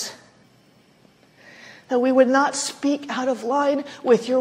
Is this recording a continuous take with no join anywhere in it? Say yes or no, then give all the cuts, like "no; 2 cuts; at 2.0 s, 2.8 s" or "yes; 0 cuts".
yes; 0 cuts